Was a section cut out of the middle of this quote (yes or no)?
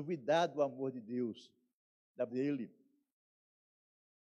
yes